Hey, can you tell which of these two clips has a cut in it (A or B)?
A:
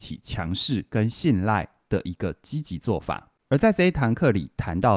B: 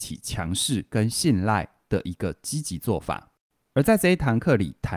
A